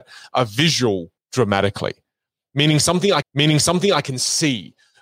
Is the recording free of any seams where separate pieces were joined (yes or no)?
no